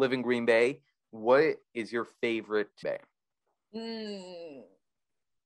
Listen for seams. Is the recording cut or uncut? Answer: cut